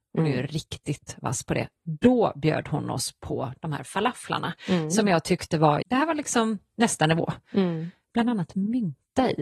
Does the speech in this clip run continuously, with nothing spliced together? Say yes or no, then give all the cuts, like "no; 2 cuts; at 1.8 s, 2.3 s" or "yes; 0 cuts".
no; 1 cut; at 5.8 s